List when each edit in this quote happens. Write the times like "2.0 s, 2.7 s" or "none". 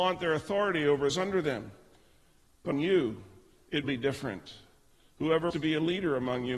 1.1 s, 2.7 s, 3.8 s, 5.5 s